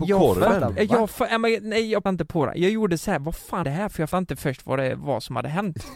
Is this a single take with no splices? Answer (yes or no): no